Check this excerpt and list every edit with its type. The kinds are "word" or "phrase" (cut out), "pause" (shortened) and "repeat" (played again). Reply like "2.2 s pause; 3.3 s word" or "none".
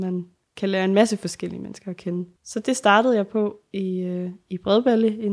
2.4 s pause

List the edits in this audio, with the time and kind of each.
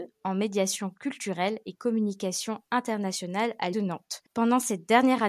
3.7 s word

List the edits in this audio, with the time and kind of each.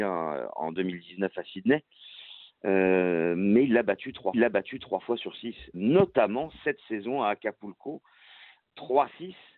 4.3 s repeat; 5.7 s word

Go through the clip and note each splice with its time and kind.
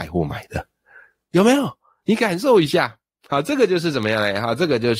none

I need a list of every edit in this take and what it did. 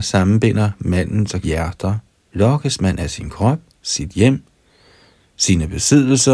1.4 s word; 2.1 s pause; 3.7 s pause

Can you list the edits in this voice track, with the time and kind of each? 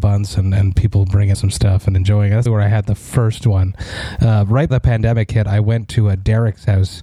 1.3 s word; 2.5 s word; 4.7 s word

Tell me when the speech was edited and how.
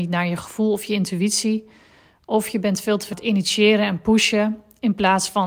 3.1 s word

